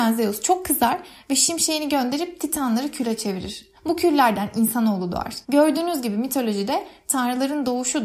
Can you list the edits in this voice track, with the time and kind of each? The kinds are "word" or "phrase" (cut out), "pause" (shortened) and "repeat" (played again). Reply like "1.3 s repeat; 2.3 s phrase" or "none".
3.8 s pause; 5.4 s pause